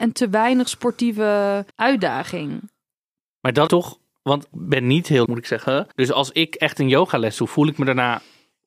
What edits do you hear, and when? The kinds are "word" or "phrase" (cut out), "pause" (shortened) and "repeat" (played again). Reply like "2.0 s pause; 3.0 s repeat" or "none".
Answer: 1.7 s pause; 3.7 s phrase; 4.5 s word; 5.3 s word; 5.9 s pause